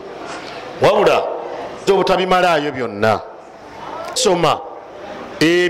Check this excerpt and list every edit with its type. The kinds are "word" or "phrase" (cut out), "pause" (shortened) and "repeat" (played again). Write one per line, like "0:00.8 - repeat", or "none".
0:01.9 - word
0:04.2 - word